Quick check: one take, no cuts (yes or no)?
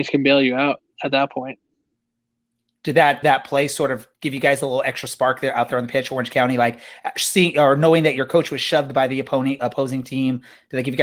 no